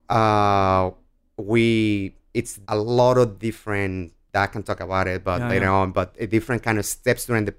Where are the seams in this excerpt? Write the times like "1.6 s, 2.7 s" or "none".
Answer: 2.6 s